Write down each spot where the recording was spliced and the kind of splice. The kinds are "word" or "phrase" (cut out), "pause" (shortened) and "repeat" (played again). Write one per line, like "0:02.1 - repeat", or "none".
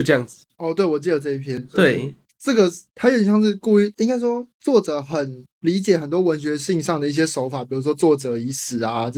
none